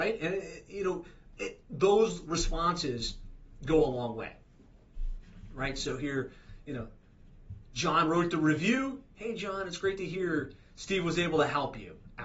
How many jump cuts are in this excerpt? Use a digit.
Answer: 0